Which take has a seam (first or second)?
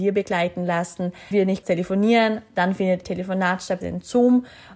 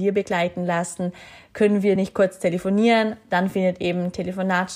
first